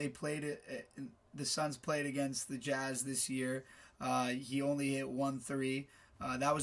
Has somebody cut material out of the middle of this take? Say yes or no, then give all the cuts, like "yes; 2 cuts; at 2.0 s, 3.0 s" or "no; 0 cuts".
no; 0 cuts